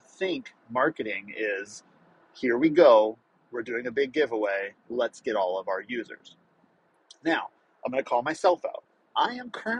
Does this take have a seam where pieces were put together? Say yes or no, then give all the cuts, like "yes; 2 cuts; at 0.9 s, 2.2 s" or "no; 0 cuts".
no; 0 cuts